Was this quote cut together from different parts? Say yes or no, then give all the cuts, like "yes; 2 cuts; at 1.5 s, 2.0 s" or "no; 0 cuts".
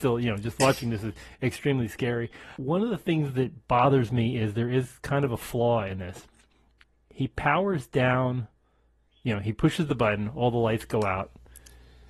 no; 0 cuts